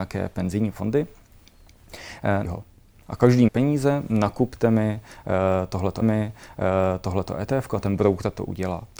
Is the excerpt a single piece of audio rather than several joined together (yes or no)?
no